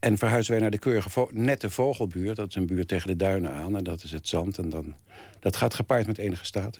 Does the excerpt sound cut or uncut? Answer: uncut